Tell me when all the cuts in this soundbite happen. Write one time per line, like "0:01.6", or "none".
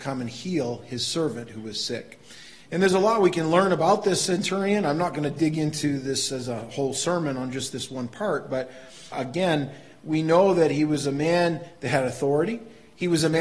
0:09.1